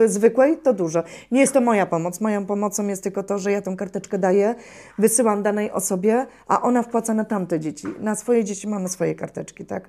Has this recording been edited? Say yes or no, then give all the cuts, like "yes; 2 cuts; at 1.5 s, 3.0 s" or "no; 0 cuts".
no; 0 cuts